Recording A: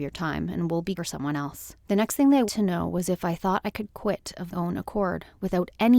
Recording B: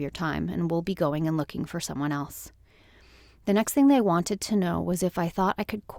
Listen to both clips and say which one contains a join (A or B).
A